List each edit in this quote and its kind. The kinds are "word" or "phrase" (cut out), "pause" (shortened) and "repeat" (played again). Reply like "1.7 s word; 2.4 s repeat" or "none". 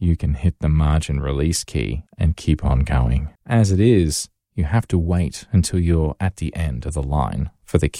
2.1 s pause; 3.4 s pause